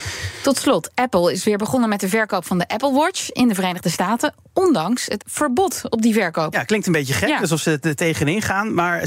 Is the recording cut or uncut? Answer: cut